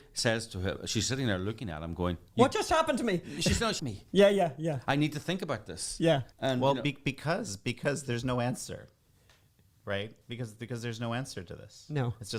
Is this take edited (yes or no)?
yes